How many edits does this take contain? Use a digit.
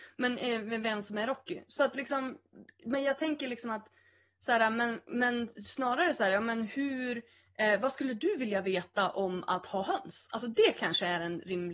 0